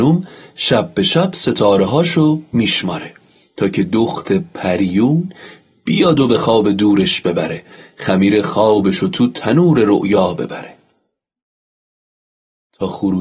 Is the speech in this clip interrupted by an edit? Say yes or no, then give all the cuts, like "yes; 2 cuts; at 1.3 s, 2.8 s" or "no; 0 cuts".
no; 0 cuts